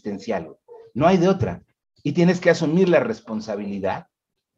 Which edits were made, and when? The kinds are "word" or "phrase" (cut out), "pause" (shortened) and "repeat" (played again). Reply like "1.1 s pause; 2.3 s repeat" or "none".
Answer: none